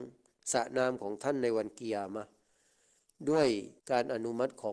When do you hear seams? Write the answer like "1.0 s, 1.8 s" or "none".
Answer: 3.8 s